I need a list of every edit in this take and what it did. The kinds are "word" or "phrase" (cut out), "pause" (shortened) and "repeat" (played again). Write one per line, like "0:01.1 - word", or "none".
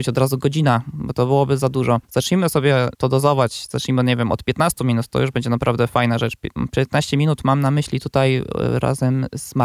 0:02.0 - pause
0:02.9 - pause